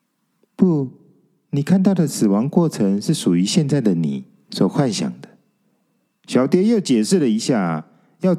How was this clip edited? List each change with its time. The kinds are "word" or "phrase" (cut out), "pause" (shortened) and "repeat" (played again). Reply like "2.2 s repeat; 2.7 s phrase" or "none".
none